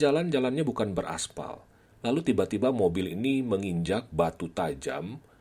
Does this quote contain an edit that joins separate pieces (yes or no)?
no